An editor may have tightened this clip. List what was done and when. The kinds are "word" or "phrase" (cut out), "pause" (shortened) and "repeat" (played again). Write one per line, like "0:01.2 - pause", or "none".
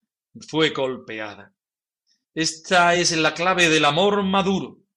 none